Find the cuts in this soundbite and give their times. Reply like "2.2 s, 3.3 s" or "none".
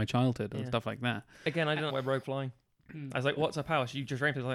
1.9 s, 2.2 s, 3.4 s